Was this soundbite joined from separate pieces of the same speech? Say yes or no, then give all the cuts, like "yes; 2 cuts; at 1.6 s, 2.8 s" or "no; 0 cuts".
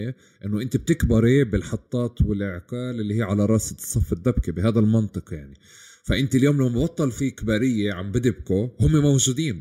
no; 0 cuts